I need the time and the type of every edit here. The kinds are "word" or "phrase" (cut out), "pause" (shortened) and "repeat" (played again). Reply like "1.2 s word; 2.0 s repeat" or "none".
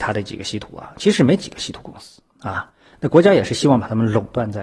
2.3 s pause